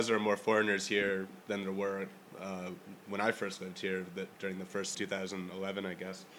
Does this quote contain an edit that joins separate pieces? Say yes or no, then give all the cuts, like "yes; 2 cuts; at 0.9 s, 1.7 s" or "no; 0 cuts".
yes; 3 cuts; at 1.4 s, 4.3 s, 4.9 s